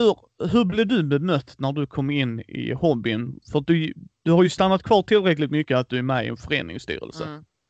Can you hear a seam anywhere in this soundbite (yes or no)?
no